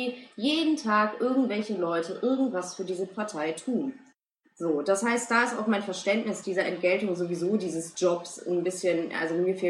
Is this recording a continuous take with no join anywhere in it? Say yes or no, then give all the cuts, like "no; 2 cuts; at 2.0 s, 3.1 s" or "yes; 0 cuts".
yes; 0 cuts